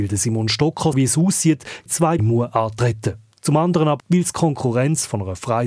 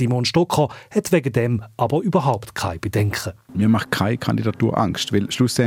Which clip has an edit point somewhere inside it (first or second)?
first